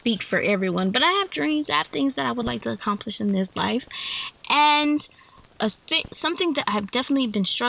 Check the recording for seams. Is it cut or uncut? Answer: uncut